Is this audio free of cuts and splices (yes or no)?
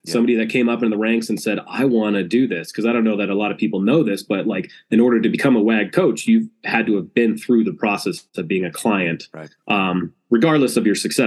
no